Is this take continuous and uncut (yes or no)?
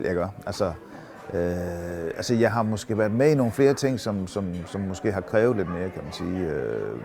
yes